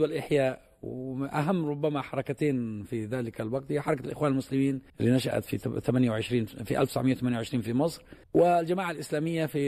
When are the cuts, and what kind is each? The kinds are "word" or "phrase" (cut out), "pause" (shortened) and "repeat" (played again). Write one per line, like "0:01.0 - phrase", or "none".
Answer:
0:04.9 - pause
0:08.2 - pause

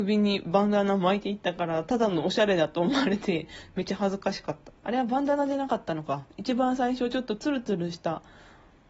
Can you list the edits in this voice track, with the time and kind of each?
0:04.8 - pause

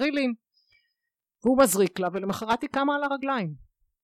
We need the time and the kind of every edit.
none

